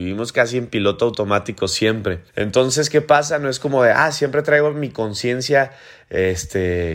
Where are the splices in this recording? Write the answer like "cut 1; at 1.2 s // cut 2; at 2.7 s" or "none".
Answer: cut 1; at 2.3 s